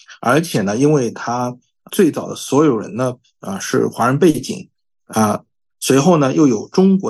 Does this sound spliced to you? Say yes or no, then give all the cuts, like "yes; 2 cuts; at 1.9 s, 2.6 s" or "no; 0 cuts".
yes; 1 cut; at 1.9 s